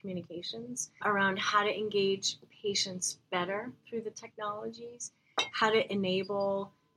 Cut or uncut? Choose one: cut